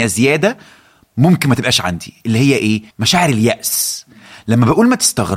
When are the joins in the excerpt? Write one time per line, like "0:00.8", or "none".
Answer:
0:02.9